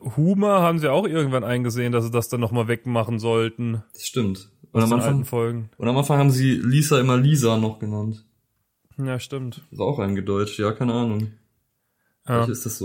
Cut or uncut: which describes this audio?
uncut